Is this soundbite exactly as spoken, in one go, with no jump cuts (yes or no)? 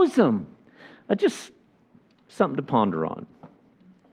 yes